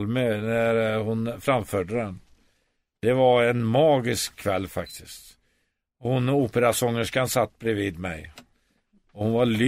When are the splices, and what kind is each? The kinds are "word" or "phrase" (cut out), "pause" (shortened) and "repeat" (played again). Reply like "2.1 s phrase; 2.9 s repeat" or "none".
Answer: 4.4 s word